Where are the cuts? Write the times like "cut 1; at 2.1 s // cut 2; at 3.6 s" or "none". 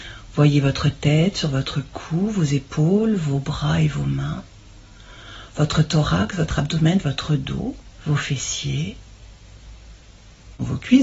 cut 1; at 8.0 s